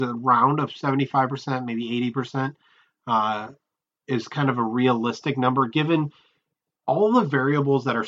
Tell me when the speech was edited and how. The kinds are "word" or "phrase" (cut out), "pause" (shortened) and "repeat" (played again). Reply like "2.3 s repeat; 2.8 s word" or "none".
none